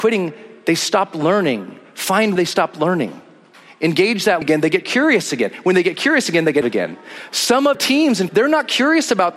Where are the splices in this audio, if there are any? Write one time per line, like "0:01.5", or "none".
0:02.4
0:04.4
0:06.6
0:07.7
0:08.3